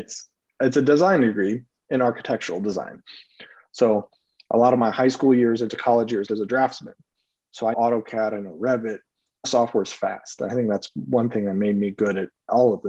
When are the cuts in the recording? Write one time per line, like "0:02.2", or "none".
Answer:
0:06.3
0:07.7
0:09.4

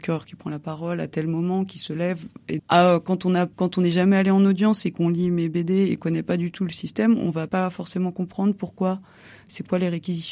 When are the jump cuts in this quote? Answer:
0:02.6
0:03.5
0:06.0
0:07.5

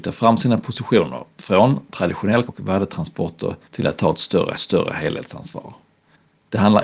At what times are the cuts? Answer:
0:01.3
0:02.5
0:03.6
0:04.5

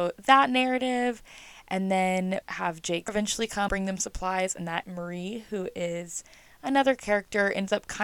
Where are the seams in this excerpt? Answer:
0:02.4
0:03.1
0:03.7
0:04.8

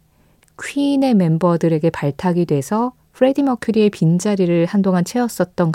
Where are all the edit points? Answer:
none

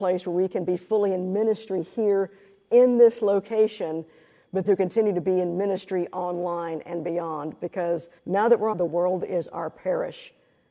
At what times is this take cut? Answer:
0:04.6
0:08.2
0:08.7

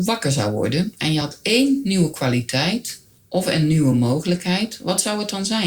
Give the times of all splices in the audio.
none

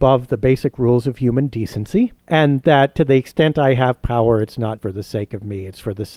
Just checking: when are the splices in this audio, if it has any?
0:02.2
0:04.8

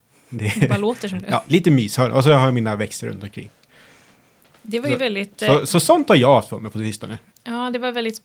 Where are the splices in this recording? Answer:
none

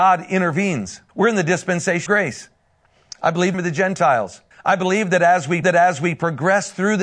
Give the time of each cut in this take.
0:01.1
0:02.1
0:03.5
0:04.5
0:05.6

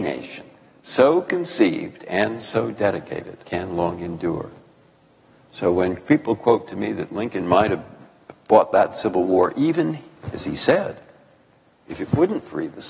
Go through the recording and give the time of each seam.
0:03.4

